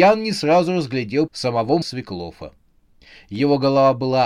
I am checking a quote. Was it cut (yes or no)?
yes